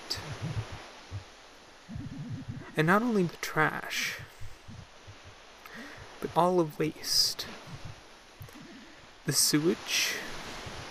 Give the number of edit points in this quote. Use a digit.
3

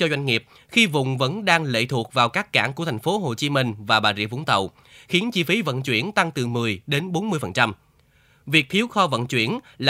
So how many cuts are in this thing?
0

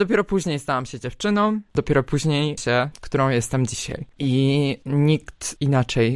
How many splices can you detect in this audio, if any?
2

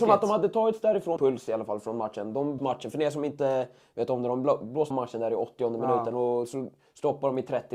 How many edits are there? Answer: 3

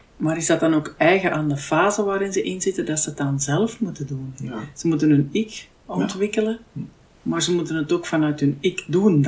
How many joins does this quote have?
1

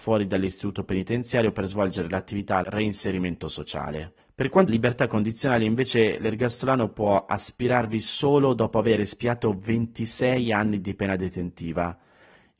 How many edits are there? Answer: 3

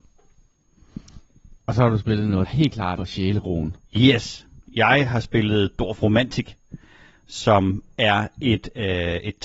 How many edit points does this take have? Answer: 2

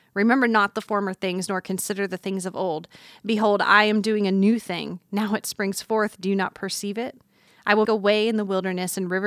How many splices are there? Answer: 1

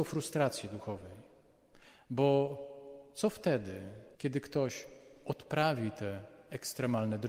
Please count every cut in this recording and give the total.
1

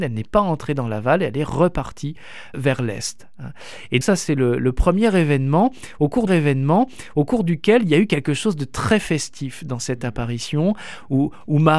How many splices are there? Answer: 3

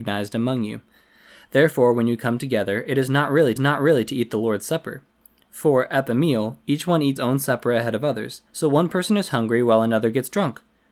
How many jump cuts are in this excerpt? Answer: 3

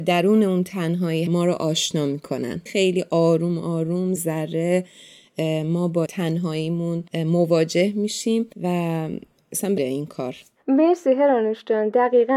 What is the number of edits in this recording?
7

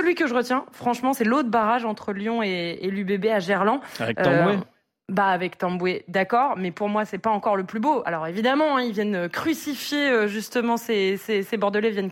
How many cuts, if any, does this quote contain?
0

